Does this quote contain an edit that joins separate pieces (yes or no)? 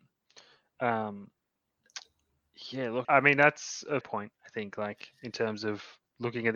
yes